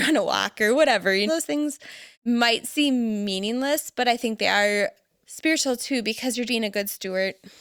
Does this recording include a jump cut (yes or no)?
yes